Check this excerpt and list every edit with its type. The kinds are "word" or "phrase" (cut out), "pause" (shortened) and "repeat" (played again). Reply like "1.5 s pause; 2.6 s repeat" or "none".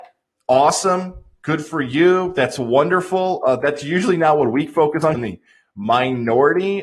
5.1 s phrase